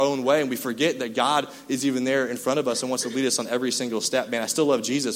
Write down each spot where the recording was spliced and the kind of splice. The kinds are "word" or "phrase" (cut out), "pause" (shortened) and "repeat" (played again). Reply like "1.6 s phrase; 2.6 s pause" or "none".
none